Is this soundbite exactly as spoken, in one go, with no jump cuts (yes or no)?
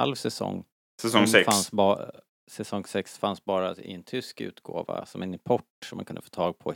yes